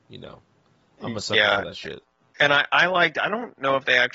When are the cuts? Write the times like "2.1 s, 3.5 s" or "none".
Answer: 2.2 s